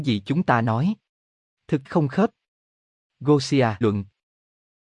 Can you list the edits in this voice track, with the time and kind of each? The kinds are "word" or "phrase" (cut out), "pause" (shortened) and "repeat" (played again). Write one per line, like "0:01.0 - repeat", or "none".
0:01.9 - word
0:03.8 - word